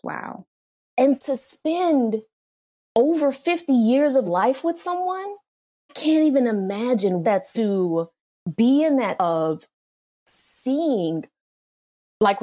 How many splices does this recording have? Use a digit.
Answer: 6